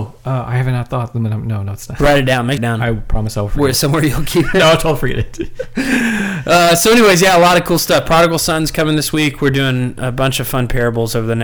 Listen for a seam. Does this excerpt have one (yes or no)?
yes